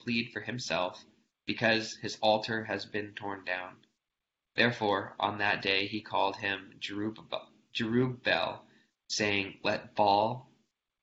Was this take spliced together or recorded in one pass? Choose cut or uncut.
uncut